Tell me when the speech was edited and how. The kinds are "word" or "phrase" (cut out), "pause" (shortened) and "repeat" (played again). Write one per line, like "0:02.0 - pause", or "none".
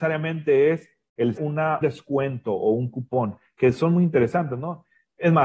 0:01.4 - word
0:01.8 - word